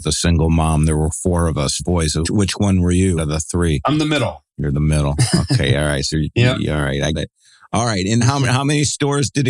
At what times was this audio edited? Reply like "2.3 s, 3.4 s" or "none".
1.8 s, 2.2 s, 3.2 s, 6.1 s, 7.1 s, 8.2 s